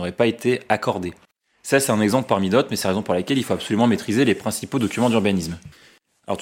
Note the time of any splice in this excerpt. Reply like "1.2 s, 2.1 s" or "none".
none